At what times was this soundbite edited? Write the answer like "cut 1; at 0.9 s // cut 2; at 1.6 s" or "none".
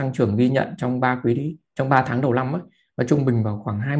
none